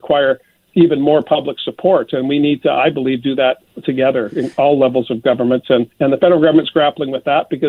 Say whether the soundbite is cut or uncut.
cut